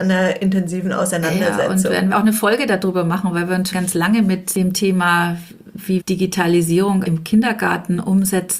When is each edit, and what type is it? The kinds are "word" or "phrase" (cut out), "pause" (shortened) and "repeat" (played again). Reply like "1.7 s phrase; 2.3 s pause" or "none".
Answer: 2.1 s word; 3.7 s word; 6.0 s word; 7.0 s word